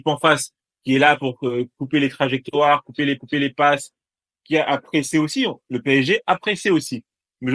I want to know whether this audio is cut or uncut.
cut